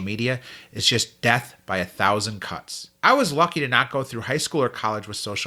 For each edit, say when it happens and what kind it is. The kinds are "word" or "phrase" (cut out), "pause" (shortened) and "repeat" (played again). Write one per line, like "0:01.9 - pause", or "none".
0:02.9 - pause